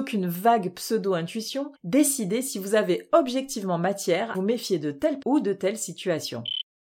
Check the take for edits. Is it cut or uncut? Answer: cut